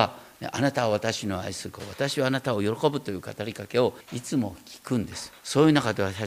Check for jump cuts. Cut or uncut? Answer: cut